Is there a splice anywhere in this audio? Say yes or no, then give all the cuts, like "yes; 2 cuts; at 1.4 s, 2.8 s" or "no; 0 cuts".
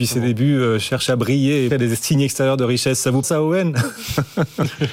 yes; 2 cuts; at 1.7 s, 3.2 s